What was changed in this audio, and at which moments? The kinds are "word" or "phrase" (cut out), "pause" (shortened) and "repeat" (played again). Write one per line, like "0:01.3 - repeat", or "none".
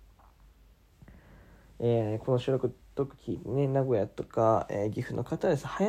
none